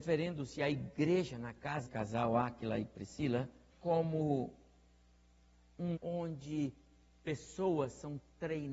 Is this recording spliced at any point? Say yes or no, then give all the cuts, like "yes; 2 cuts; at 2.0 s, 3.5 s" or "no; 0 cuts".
yes; 3 cuts; at 1.8 s, 3.7 s, 5.9 s